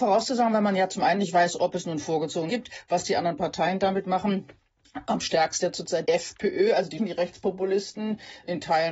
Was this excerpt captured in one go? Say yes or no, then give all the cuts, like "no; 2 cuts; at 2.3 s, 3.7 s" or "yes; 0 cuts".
no; 4 cuts; at 2.5 s, 5.6 s, 6.1 s, 7.0 s